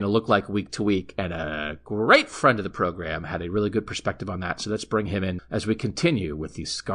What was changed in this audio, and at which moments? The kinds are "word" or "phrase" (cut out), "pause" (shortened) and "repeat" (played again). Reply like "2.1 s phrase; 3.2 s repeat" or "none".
5.4 s word